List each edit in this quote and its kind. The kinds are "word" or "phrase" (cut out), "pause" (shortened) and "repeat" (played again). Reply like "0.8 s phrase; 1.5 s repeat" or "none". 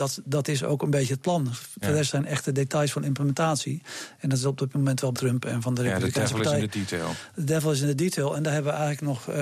5.1 s phrase